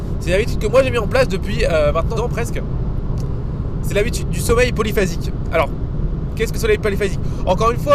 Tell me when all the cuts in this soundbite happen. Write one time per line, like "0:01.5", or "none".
0:02.2
0:06.5